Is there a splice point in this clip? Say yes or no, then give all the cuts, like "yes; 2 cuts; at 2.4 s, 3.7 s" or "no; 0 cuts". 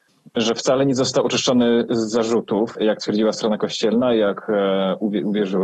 no; 0 cuts